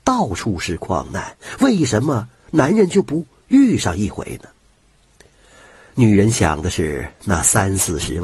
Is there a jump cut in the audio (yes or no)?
no